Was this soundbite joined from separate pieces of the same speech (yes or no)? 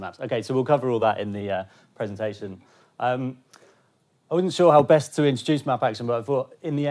no